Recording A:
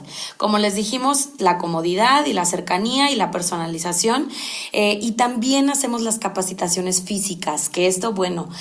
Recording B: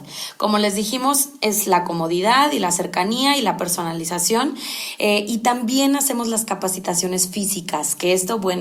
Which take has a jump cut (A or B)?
A